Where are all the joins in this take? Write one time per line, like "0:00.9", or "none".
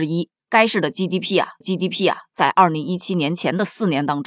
0:01.6